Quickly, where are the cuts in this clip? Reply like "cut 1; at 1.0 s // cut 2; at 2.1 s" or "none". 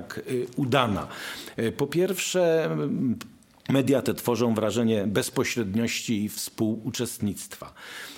none